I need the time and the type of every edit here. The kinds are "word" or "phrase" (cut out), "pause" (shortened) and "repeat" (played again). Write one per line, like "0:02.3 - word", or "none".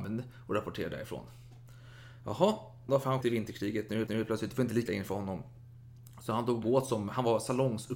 0:02.9 - phrase
0:03.2 - word
0:04.1 - repeat
0:04.9 - phrase
0:06.6 - word